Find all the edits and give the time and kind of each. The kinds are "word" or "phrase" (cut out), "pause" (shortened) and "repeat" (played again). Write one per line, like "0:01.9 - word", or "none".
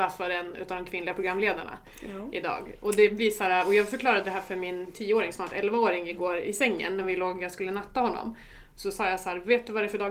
none